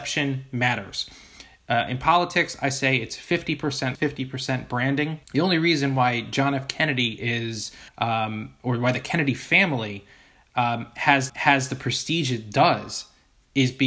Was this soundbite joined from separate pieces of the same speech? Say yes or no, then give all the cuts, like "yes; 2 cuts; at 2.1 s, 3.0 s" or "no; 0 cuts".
yes; 4 cuts; at 4.0 s, 5.2 s, 7.9 s, 11.3 s